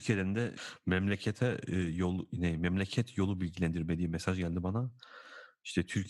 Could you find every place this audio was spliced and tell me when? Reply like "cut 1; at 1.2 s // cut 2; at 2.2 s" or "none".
none